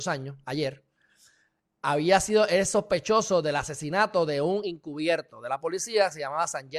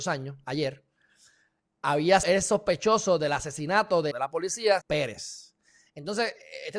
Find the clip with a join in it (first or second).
second